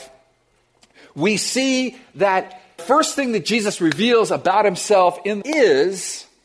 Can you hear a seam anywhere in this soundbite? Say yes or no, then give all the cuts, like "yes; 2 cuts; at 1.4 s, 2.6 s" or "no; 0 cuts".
yes; 2 cuts; at 2.8 s, 5.4 s